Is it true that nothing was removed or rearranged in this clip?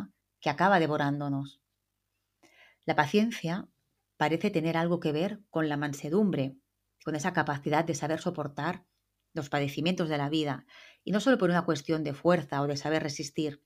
yes; 0 cuts

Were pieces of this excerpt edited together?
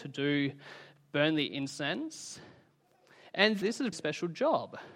yes; 2 cuts; at 3.6 s, 3.9 s

